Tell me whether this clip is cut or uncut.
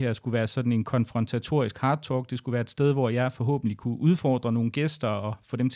uncut